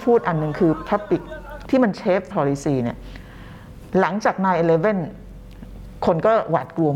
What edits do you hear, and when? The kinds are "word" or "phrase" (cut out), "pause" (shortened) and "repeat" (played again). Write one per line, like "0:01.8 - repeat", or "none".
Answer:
0:01.6 - word
0:02.3 - word